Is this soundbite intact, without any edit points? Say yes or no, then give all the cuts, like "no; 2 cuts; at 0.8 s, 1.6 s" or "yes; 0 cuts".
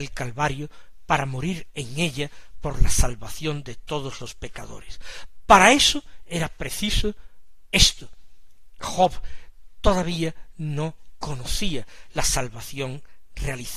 yes; 0 cuts